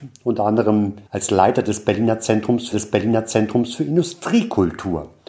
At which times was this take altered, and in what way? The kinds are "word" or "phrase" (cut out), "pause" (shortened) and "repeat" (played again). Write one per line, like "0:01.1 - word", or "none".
0:01.1 - pause
0:02.7 - repeat